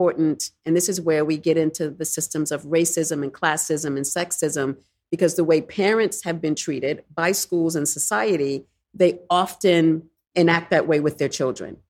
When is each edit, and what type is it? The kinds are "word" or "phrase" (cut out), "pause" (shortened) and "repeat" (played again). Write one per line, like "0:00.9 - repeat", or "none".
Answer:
none